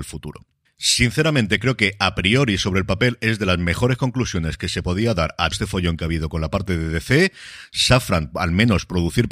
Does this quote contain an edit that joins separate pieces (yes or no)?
yes